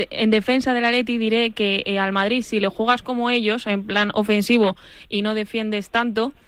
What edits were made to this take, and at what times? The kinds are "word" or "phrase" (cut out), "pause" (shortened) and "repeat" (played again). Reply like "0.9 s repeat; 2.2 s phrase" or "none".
none